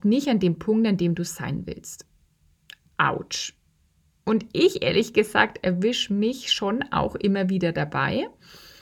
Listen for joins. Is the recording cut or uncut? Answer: uncut